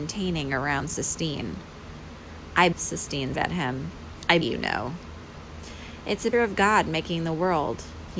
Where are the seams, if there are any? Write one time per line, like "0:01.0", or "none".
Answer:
0:02.7
0:03.3
0:04.4
0:06.3